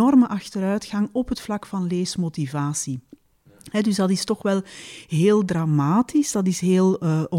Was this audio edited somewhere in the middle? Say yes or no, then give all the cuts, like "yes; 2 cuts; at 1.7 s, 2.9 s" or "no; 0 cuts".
no; 0 cuts